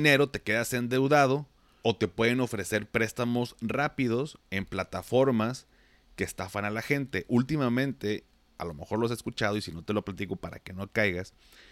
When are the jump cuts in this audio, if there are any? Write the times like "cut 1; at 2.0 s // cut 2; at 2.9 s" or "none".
cut 1; at 1.8 s